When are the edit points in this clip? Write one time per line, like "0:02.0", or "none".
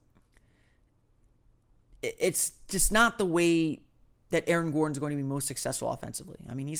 none